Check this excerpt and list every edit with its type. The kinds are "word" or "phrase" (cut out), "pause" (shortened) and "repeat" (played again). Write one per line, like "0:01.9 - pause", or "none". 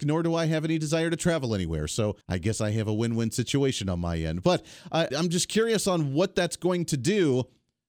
0:02.2 - pause
0:05.1 - word